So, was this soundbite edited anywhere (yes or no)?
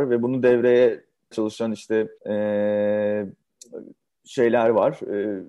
yes